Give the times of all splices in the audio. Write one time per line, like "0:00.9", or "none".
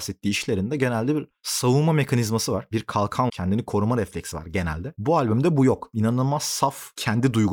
0:03.3